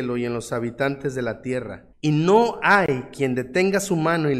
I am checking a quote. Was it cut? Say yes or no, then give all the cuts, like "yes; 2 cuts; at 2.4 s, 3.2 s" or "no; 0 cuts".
yes; 1 cut; at 1.9 s